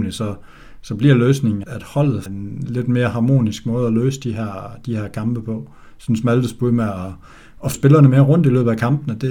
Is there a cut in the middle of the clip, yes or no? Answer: yes